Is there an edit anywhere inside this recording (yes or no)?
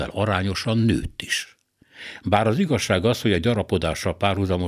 no